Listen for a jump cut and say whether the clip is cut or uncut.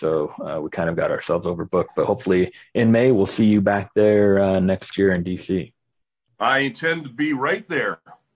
uncut